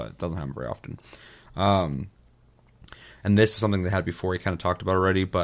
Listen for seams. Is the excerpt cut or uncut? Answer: uncut